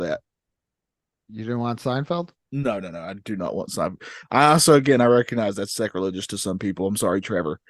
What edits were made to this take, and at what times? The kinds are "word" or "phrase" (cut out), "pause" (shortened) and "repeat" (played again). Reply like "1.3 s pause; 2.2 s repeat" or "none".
2.4 s pause